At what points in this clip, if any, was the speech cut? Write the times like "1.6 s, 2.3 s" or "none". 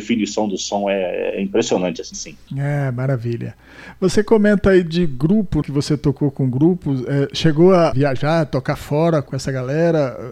2.1 s, 5.6 s

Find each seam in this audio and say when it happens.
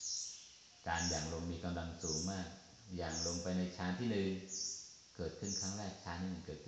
5.1 s

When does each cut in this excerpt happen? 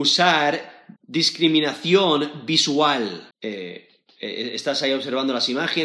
1.0 s, 3.3 s

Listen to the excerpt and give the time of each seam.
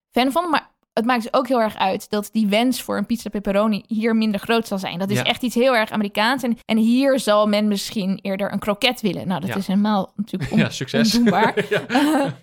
6.6 s

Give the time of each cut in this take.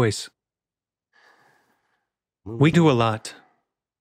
2.7 s

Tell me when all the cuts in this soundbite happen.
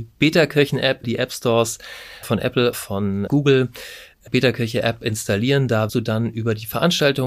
1.0 s, 2.2 s, 2.7 s, 3.3 s, 4.3 s, 5.9 s

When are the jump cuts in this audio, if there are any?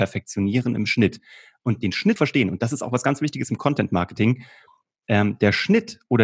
2.2 s

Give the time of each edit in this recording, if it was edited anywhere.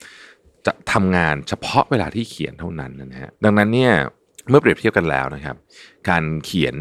3.4 s

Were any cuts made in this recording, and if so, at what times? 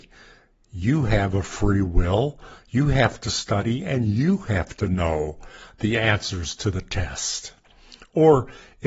none

